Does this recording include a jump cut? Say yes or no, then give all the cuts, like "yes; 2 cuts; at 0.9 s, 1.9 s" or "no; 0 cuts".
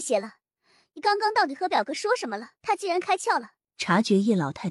yes; 2 cuts; at 2.6 s, 3.6 s